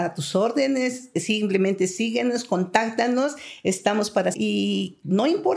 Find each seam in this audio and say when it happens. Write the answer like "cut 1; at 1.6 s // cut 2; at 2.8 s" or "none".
cut 1; at 4.3 s

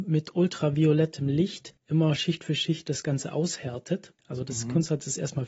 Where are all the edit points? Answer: cut 1; at 1.8 s // cut 2; at 4.2 s

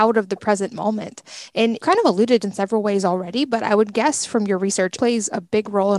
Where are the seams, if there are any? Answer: cut 1; at 1.8 s // cut 2; at 2.4 s // cut 3; at 5.0 s

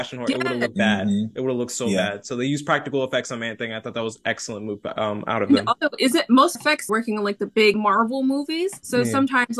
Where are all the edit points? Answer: cut 1; at 6.6 s // cut 2; at 6.9 s

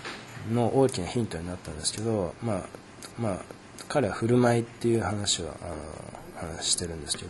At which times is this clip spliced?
cut 1; at 3.1 s

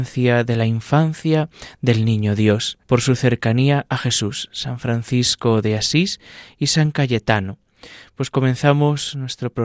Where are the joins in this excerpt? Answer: cut 1; at 2.8 s

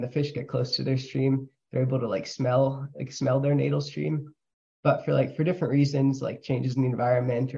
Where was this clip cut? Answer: none

